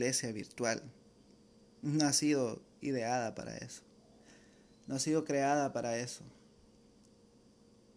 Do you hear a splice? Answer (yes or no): no